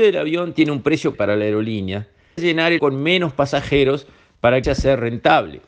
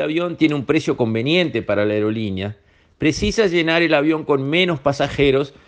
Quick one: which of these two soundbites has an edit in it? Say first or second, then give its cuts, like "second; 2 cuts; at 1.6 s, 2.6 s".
first; 4 cuts; at 1.1 s, 2.4 s, 2.8 s, 4.6 s